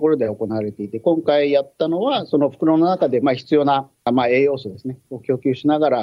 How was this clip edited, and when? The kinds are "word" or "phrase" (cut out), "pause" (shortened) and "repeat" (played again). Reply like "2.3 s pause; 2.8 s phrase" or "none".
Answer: 4.0 s pause